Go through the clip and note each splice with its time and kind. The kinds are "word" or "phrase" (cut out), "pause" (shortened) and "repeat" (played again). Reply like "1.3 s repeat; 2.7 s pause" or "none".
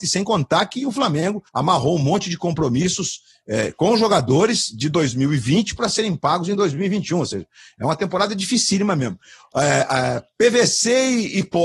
1.5 s pause